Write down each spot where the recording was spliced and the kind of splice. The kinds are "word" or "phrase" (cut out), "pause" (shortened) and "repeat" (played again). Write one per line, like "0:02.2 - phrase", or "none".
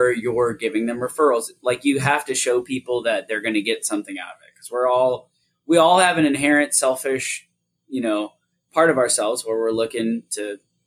none